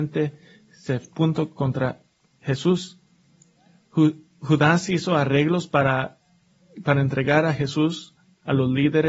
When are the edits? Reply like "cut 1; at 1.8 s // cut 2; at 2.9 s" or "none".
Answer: cut 1; at 1.6 s